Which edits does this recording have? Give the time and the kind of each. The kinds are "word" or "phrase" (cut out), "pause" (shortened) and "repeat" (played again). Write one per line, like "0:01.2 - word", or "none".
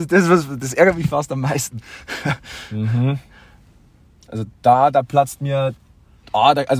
none